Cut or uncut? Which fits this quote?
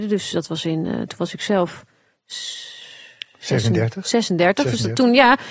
uncut